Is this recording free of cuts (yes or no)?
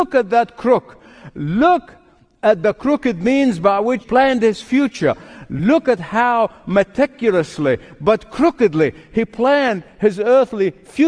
no